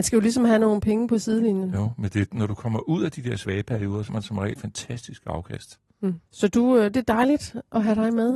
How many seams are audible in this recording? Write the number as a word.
three